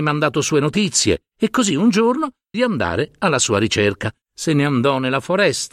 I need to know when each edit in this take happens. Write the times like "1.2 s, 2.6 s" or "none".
1.3 s, 2.5 s, 4.2 s